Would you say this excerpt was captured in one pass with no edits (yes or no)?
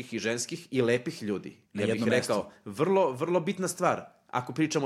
no